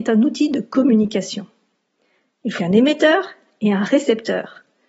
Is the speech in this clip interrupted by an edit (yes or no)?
yes